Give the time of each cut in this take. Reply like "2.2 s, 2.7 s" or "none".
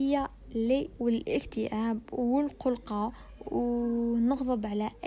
1.0 s

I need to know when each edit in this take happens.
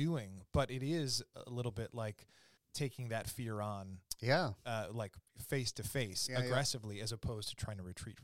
2.6 s, 4.6 s

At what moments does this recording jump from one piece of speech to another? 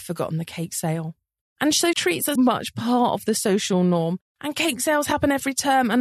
1.9 s, 2.4 s

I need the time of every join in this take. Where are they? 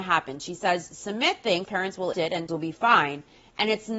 1.7 s, 2.1 s, 2.5 s

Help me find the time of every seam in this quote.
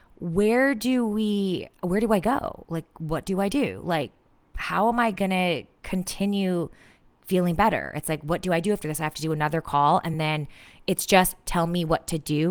none

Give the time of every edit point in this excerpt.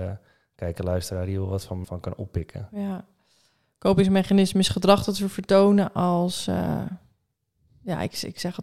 1.8 s

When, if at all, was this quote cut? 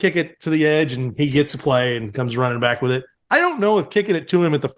1.5 s, 3.1 s

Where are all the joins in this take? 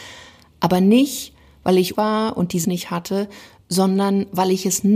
1.9 s, 2.6 s

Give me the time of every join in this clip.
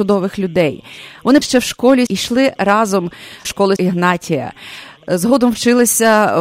1.4 s, 2.1 s, 3.4 s, 3.8 s

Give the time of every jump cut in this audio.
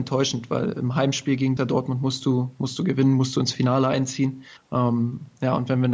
1.6 s, 4.6 s

